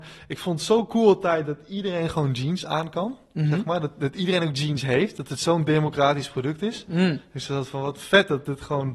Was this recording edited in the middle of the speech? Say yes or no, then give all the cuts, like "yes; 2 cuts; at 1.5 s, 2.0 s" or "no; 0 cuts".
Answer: no; 0 cuts